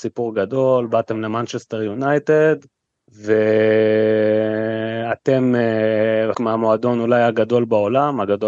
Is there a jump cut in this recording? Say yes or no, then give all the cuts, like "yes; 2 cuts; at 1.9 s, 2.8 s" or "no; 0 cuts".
yes; 2 cuts; at 2.9 s, 6.3 s